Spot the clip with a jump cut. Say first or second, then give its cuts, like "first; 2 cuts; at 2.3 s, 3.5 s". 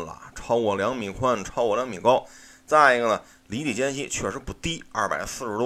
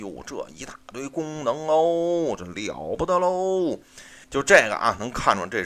second; 1 cut; at 4.2 s